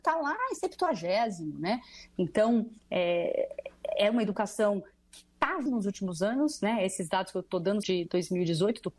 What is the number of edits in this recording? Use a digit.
3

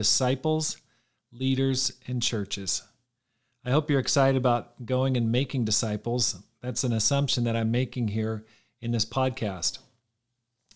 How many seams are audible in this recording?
0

